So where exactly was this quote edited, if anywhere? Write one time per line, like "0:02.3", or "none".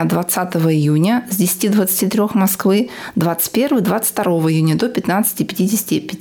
none